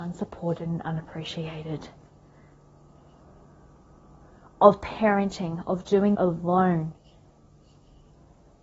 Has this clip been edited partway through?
yes; 1 cut; at 6.1 s

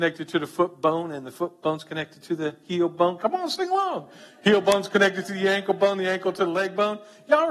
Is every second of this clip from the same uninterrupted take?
yes; 0 cuts

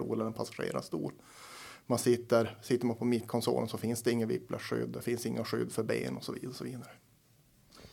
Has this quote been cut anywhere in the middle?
no; 0 cuts

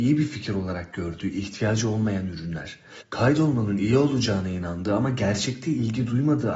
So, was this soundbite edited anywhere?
no; 0 cuts

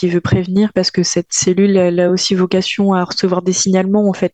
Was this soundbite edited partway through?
no; 0 cuts

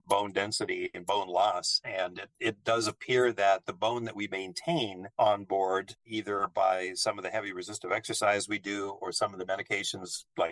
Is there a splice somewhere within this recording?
yes; 1 cut; at 5.1 s

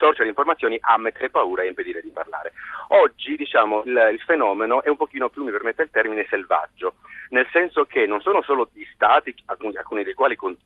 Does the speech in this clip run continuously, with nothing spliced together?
yes; 0 cuts

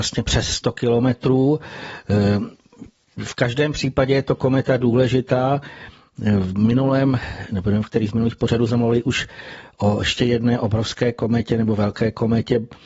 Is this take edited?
no; 0 cuts

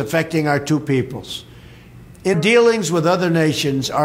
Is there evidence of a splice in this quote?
yes; 1 cut; at 2.3 s

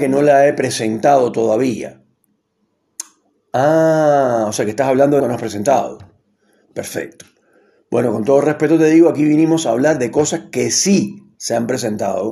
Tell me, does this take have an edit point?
yes; 1 cut; at 5.2 s

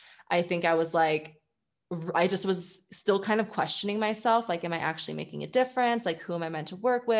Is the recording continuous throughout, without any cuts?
yes; 0 cuts

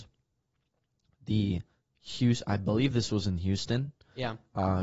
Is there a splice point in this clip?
no; 0 cuts

